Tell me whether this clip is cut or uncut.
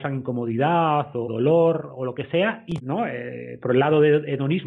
cut